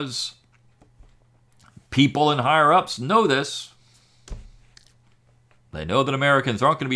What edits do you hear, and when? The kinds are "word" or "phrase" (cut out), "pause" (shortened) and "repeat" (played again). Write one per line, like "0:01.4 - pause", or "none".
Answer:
none